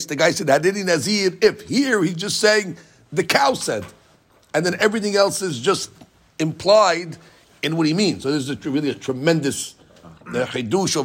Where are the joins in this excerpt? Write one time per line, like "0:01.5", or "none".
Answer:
none